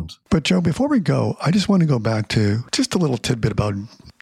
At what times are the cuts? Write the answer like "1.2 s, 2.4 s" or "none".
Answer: 2.7 s